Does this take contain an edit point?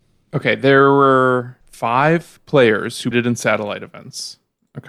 yes; 2 cuts; at 1.6 s, 3.1 s

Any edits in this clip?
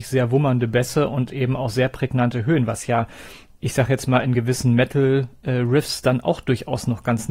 no; 0 cuts

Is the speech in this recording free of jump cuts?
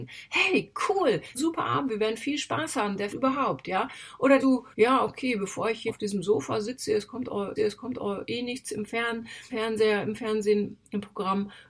no; 7 cuts; at 1.3 s, 3.1 s, 4.4 s, 4.7 s, 5.9 s, 7.6 s, 9.5 s

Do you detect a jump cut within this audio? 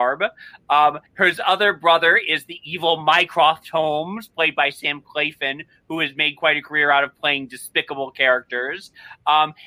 yes; 1 cut; at 1.1 s

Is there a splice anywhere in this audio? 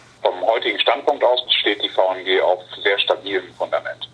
yes; 1 cut; at 1.5 s

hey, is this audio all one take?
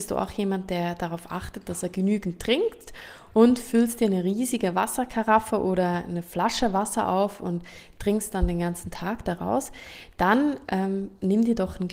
yes; 0 cuts

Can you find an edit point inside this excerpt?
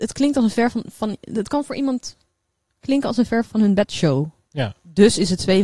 yes; 1 cut; at 3.4 s

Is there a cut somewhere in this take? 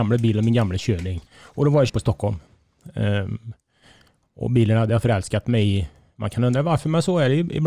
yes; 2 cuts; at 1.3 s, 1.9 s

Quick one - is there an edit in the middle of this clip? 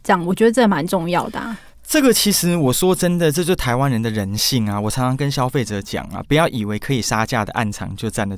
no; 0 cuts

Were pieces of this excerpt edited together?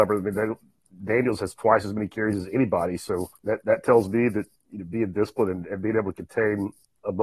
yes; 1 cut; at 3.4 s

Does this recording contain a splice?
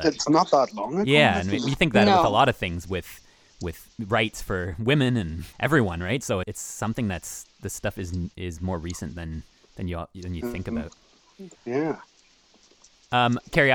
yes; 6 cuts; at 4.0 s, 5.5 s, 6.4 s, 7.5 s, 9.5 s, 11.5 s

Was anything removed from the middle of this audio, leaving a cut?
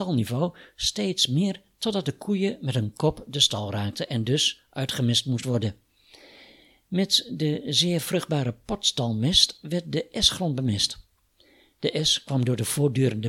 no; 0 cuts

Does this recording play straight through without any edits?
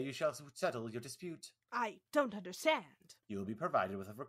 no; 1 cut; at 3.2 s

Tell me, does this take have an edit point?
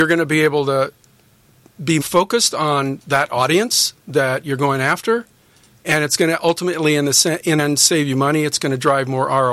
yes; 2 cuts; at 2.0 s, 7.6 s

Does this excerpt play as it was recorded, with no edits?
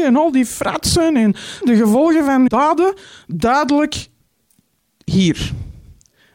no; 2 cuts; at 1.6 s, 2.5 s

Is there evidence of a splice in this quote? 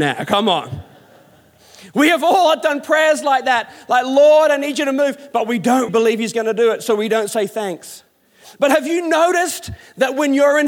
yes; 1 cut; at 5.9 s

